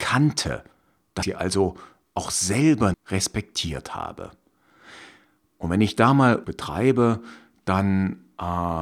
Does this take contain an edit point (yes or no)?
yes